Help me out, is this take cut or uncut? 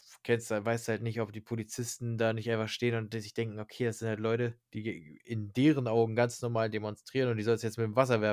cut